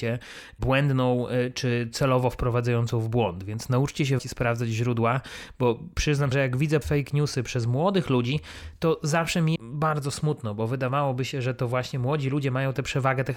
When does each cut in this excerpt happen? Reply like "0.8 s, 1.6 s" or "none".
4.2 s, 6.3 s, 6.8 s, 9.6 s